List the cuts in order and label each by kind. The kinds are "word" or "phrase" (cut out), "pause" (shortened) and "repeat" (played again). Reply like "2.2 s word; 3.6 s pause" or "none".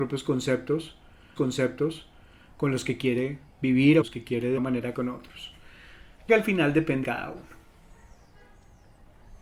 1.4 s repeat; 4.0 s phrase; 4.6 s word; 4.9 s word; 6.3 s phrase; 7.0 s word